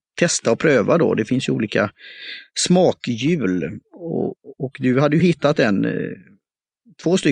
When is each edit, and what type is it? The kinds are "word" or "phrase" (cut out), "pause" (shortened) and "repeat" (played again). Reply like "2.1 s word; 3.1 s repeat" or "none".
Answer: none